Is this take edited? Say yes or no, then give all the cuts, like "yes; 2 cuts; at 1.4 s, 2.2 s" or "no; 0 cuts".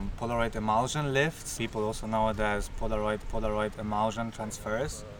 yes; 2 cuts; at 1.6 s, 3.2 s